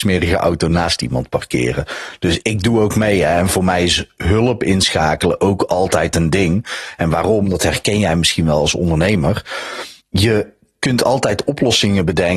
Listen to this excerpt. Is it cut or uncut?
cut